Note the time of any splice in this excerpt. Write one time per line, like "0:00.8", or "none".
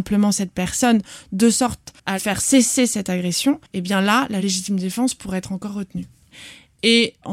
0:02.0
0:03.7